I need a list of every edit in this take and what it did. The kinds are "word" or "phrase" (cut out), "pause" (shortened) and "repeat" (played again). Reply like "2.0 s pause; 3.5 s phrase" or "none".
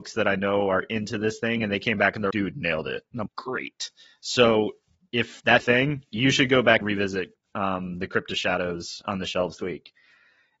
2.3 s word; 3.3 s word; 5.6 s word; 6.8 s word; 9.0 s word; 9.6 s word